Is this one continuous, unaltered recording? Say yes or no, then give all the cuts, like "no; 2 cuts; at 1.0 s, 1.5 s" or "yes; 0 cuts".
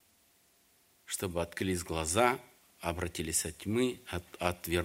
yes; 0 cuts